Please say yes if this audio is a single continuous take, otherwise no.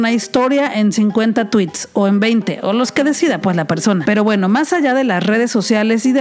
yes